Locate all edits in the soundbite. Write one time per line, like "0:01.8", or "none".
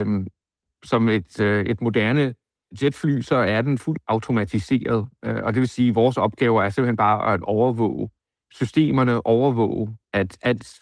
none